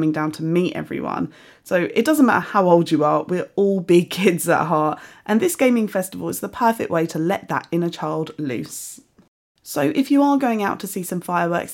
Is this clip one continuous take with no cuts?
yes; 0 cuts

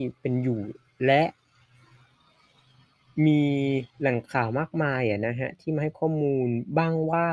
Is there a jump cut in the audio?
yes; 1 cut; at 3.9 s

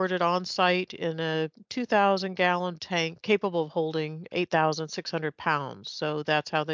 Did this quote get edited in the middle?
yes; 1 cut; at 2.8 s

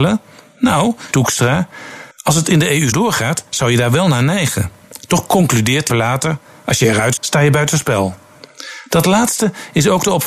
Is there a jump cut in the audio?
yes; 5 cuts; at 1.1 s, 2.1 s, 2.9 s, 5.9 s, 7.2 s

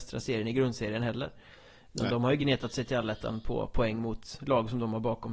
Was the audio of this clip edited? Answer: no; 0 cuts

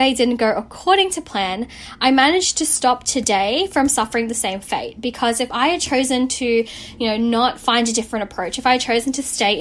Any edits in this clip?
no; 0 cuts

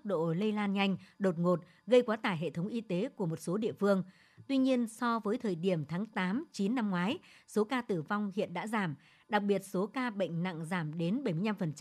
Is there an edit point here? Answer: no; 0 cuts

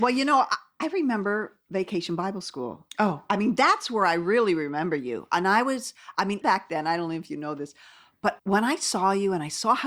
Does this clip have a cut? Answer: yes; 2 cuts; at 6.4 s, 8.4 s

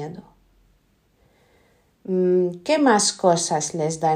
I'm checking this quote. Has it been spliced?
no; 0 cuts

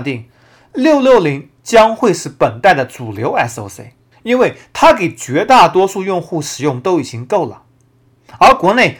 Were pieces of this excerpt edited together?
yes; 1 cut; at 4.1 s

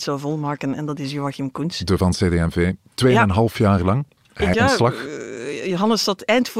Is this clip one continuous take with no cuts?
no; 2 cuts; at 2.0 s, 4.5 s

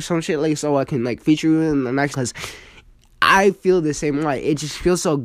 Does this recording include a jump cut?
yes; 1 cut; at 2.1 s

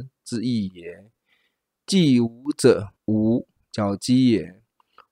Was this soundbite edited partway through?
yes; 1 cut; at 3.0 s

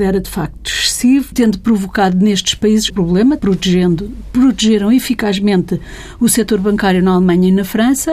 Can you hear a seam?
yes; 3 cuts; at 1.3 s, 2.9 s, 3.4 s

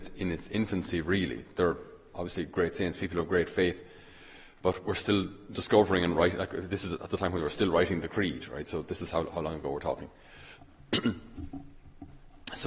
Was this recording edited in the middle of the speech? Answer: no; 0 cuts

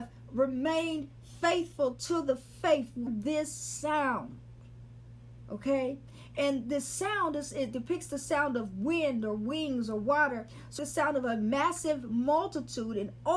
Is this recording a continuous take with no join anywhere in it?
no; 3 cuts; at 3.1 s, 7.7 s, 10.8 s

